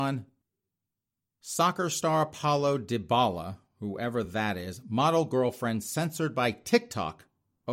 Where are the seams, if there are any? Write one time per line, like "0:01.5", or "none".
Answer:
none